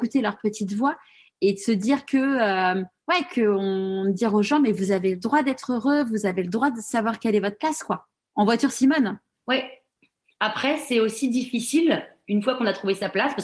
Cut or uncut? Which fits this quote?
uncut